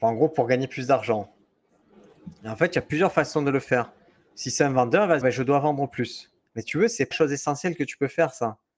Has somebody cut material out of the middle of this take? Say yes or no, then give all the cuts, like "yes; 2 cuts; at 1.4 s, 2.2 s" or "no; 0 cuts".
yes; 3 cuts; at 5.2 s, 6.5 s, 7.1 s